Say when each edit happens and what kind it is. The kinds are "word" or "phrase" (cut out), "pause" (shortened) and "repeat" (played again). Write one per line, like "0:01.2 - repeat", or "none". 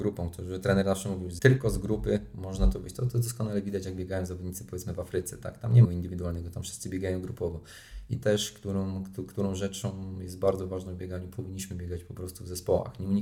0:05.8 - phrase
0:08.2 - word

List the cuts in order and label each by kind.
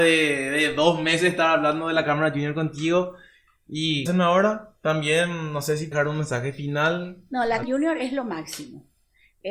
0:04.1 - word
0:05.9 - word
0:07.6 - word

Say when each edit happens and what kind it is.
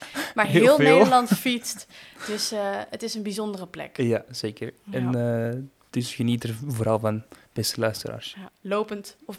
none

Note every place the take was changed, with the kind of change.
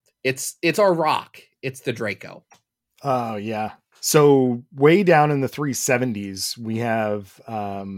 none

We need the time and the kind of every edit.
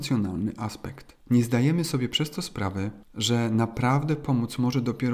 0:01.2 - pause
0:03.0 - pause

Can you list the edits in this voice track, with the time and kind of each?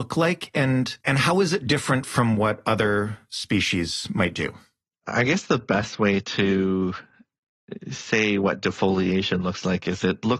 0:01.0 - pause

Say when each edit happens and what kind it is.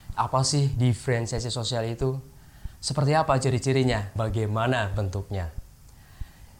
0:04.2 - word

